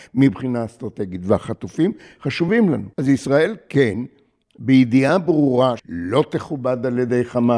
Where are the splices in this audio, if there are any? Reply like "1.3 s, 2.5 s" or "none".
2.9 s, 5.8 s